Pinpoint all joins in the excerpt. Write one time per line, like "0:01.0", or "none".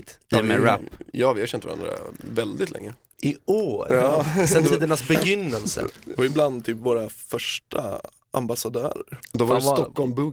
none